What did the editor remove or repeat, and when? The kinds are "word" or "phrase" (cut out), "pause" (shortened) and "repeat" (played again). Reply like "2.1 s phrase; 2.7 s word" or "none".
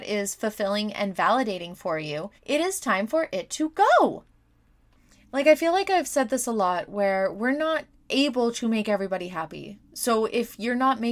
2.4 s pause